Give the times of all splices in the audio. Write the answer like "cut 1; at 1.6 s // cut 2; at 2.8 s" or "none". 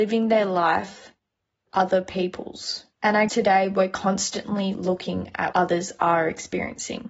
cut 1; at 1.7 s // cut 2; at 2.9 s // cut 3; at 3.3 s // cut 4; at 5.5 s